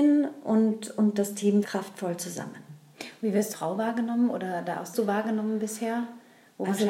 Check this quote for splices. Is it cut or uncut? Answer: cut